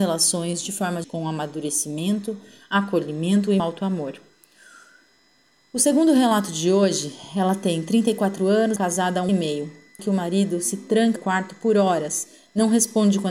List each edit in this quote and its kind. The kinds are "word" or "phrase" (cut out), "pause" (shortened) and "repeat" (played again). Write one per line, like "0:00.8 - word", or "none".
0:01.0 - word
0:03.6 - word
0:08.8 - word
0:09.3 - word
0:10.0 - word
0:11.2 - word